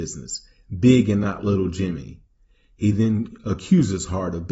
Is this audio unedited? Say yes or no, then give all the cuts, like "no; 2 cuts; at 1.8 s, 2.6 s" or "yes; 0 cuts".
yes; 0 cuts